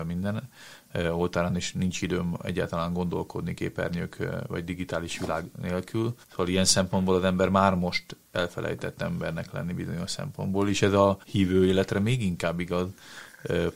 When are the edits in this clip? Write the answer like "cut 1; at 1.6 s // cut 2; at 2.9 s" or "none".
cut 1; at 6.2 s // cut 2; at 11.2 s